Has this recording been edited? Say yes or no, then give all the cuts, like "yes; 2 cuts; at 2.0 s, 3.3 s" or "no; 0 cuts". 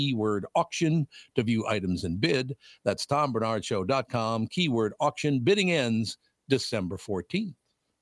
no; 0 cuts